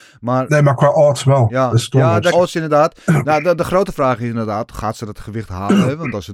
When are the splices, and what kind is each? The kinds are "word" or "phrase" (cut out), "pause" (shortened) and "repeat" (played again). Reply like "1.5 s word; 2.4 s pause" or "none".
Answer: 2.3 s word